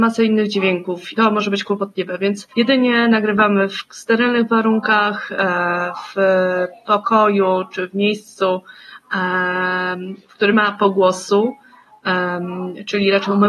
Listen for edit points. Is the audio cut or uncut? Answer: cut